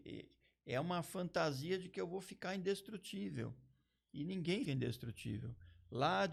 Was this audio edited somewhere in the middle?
yes; 1 cut; at 4.6 s

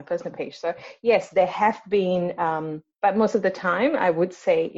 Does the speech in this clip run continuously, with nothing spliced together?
no; 1 cut; at 2.9 s

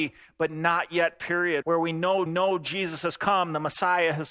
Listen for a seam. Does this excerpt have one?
yes; 2 cuts; at 1.6 s, 2.3 s

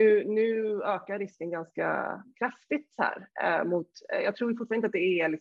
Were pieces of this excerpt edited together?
no; 0 cuts

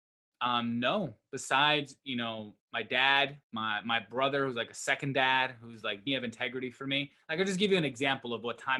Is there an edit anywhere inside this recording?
yes; 3 cuts; at 2.6 s, 3.4 s, 6.1 s

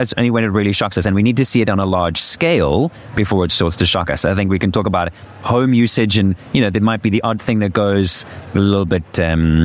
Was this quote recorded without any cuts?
yes; 0 cuts

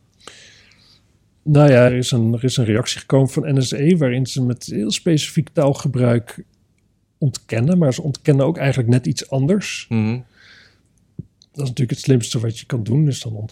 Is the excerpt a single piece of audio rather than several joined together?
no; 1 cut; at 1.9 s

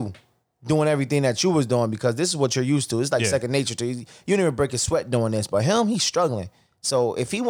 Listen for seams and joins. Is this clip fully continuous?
yes; 0 cuts

